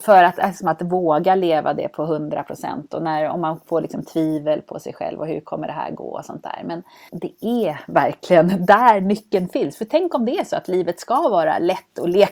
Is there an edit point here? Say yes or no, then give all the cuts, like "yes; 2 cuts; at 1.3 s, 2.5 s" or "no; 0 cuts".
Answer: no; 0 cuts